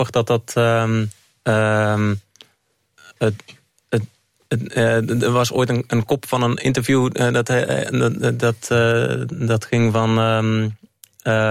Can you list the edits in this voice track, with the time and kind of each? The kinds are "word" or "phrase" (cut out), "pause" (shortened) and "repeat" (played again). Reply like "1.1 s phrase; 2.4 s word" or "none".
none